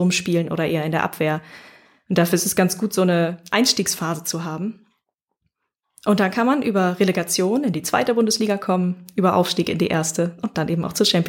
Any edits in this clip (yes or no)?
no